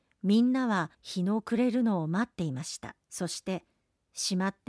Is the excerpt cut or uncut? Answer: cut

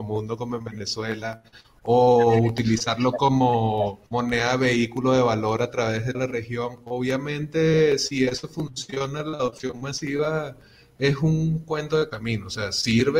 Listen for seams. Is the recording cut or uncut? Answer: cut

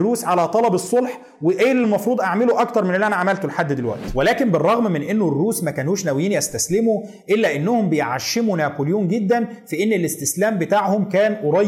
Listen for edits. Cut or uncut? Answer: uncut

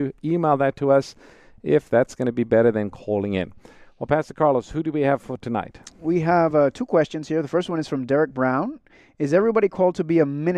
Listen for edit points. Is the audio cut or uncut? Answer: uncut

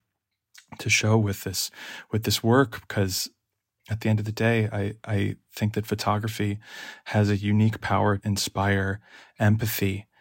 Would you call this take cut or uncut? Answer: cut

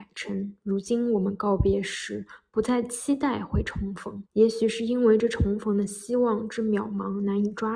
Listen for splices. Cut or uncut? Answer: cut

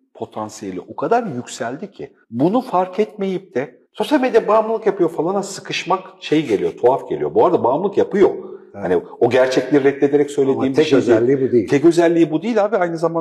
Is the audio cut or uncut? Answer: cut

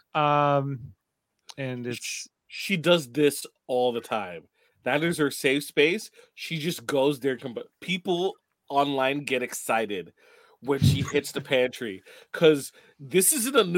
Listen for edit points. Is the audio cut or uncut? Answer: uncut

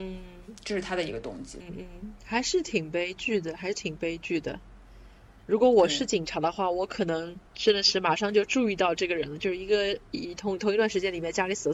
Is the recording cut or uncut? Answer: cut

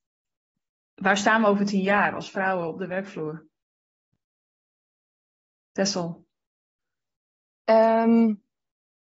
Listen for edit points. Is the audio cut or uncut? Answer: uncut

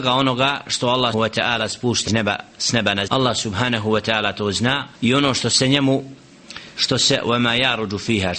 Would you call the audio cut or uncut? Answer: cut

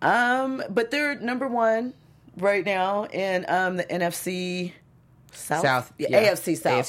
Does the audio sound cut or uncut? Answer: uncut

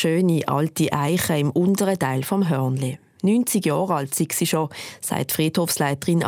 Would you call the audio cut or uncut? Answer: uncut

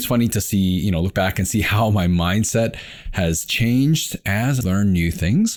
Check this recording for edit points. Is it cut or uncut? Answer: cut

